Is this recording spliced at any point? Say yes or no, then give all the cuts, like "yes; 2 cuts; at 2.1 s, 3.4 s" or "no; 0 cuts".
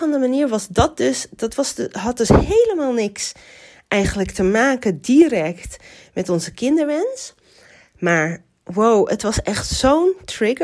no; 0 cuts